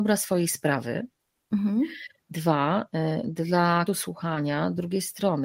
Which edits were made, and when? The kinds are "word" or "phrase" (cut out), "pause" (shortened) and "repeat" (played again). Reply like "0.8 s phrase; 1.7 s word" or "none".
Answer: 3.9 s word